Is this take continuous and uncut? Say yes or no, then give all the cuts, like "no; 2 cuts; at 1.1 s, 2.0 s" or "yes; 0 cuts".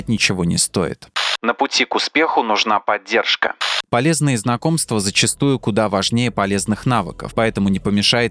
yes; 0 cuts